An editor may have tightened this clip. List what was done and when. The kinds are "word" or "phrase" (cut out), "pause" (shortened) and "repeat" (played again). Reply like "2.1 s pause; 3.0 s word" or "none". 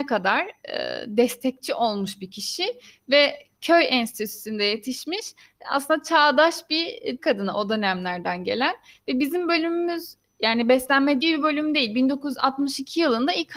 7.2 s word; 11.2 s phrase